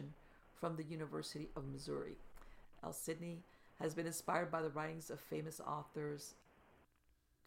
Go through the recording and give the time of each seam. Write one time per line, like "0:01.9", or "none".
none